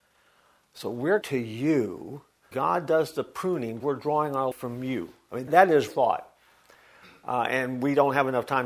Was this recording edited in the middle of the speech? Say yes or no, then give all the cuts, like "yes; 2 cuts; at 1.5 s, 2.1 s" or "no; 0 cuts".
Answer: yes; 6 cuts; at 1.2 s, 2.5 s, 3.8 s, 4.5 s, 5.5 s, 5.9 s